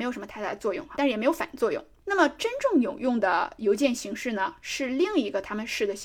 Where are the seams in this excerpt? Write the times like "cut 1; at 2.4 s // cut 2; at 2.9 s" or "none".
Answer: cut 1; at 0.9 s

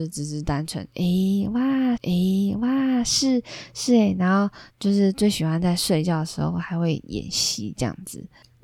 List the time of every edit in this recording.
cut 1; at 2.0 s // cut 2; at 4.7 s

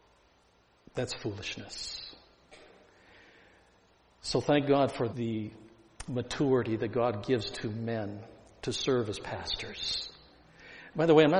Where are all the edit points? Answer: cut 1; at 5.1 s

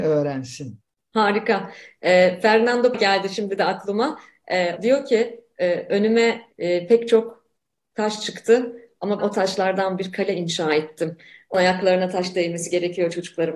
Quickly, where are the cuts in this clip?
cut 1; at 0.9 s // cut 2; at 2.9 s // cut 3; at 4.8 s // cut 4; at 6.5 s // cut 5; at 9.2 s // cut 6; at 11.5 s

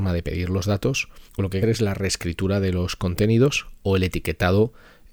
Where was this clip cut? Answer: cut 1; at 1.3 s // cut 2; at 1.6 s

